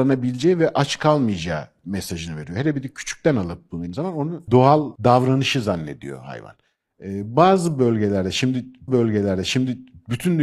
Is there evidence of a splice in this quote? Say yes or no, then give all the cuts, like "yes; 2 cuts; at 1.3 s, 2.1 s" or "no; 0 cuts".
yes; 2 cuts; at 3.9 s, 8.9 s